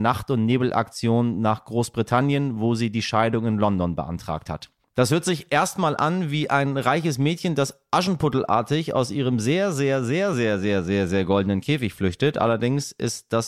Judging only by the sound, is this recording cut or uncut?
uncut